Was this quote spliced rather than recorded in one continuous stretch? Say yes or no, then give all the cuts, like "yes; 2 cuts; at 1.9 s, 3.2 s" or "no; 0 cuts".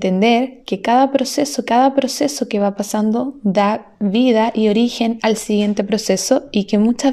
yes; 1 cut; at 1.7 s